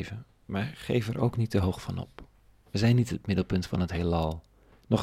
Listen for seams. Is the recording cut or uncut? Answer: uncut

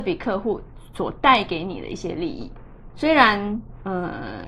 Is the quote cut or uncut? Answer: cut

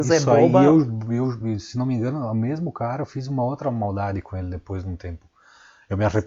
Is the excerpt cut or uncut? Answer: uncut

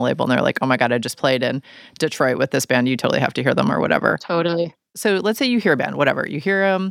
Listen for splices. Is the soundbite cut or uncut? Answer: uncut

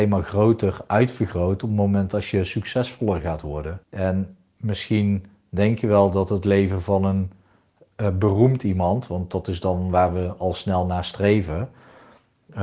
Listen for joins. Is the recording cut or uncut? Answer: cut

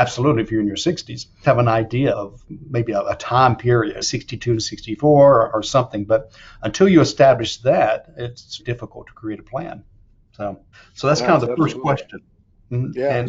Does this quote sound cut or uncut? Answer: cut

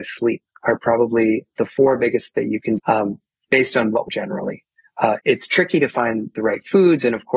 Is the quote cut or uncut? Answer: cut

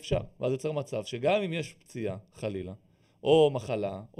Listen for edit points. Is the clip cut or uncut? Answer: uncut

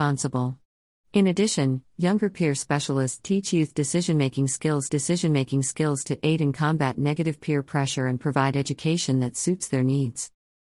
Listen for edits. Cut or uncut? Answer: cut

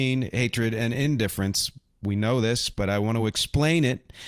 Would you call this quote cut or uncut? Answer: uncut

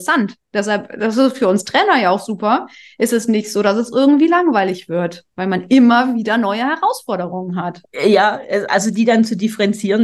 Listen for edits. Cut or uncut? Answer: uncut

